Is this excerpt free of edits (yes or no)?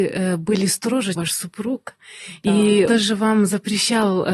no